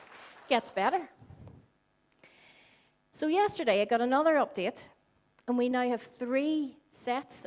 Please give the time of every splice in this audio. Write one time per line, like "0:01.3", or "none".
none